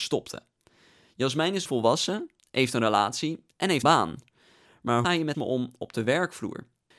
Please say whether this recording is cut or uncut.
cut